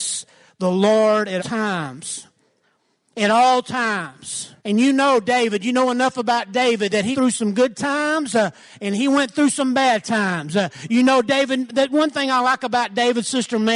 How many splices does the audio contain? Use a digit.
3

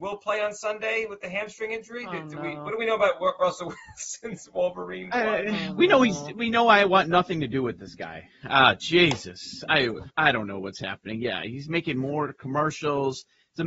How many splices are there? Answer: 1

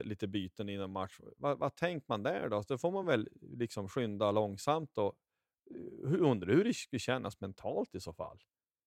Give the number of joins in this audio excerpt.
0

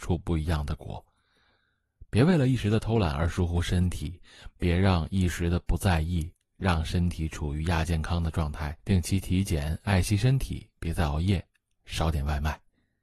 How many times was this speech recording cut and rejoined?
2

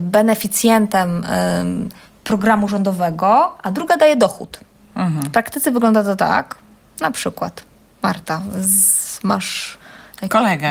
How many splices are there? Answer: 0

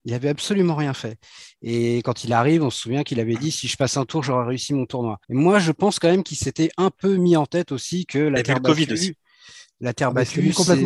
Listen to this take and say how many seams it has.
1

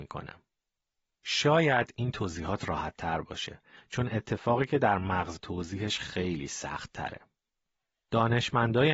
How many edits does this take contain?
1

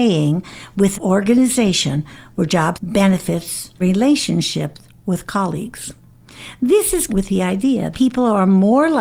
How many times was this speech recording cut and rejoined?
5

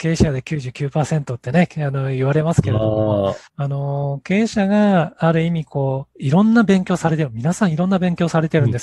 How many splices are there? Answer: 1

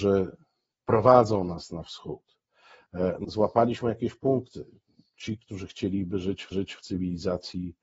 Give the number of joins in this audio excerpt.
2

